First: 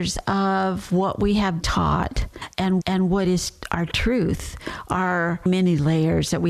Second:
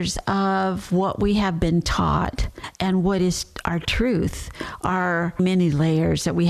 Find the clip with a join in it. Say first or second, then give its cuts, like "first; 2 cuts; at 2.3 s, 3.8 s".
first; 2 cuts; at 1.6 s, 2.8 s